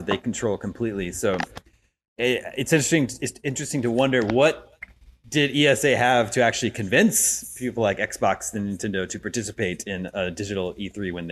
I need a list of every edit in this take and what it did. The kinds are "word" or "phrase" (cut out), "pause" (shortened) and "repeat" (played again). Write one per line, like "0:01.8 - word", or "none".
none